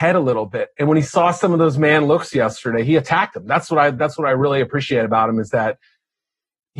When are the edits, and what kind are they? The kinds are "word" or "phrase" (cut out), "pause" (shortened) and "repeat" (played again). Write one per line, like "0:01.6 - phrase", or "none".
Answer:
none